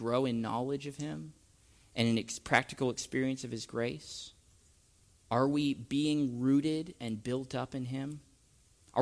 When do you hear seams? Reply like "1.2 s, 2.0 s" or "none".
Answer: 5.0 s